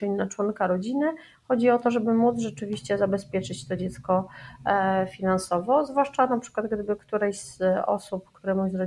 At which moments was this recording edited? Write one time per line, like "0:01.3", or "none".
none